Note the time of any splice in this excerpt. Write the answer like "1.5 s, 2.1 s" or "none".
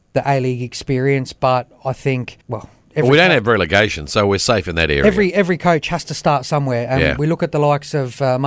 2.4 s